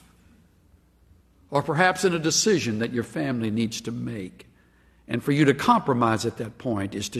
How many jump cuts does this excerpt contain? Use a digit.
0